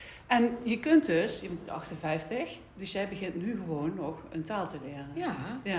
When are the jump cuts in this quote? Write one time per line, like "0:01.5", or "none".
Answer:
none

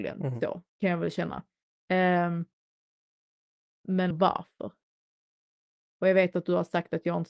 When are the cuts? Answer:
0:04.1

